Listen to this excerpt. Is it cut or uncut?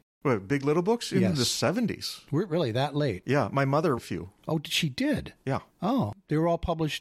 cut